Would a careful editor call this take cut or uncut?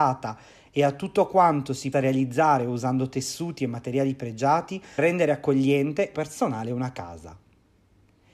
cut